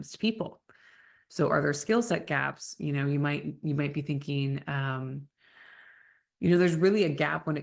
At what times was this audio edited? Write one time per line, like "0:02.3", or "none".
none